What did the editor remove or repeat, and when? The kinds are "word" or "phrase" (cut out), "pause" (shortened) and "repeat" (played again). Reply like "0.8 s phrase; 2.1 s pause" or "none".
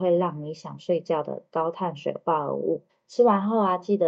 2.9 s pause